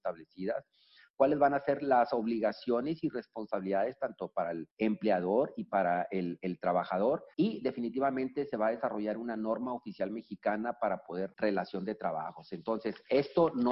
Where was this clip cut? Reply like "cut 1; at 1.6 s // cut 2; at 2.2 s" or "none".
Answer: cut 1; at 4.7 s // cut 2; at 7.3 s // cut 3; at 11.3 s